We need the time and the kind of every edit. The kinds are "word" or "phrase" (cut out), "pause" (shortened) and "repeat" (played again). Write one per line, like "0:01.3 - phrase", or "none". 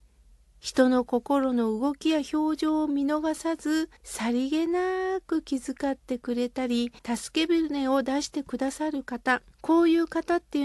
0:04.0 - pause
0:07.0 - pause
0:09.5 - pause